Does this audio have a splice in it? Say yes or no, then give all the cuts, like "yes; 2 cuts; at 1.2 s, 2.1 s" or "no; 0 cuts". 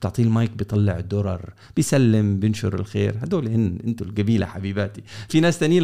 no; 0 cuts